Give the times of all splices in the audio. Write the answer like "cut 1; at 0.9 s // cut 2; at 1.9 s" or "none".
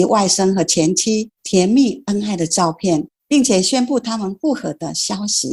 cut 1; at 1.4 s // cut 2; at 3.2 s